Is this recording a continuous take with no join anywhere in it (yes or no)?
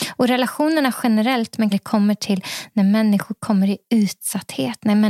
no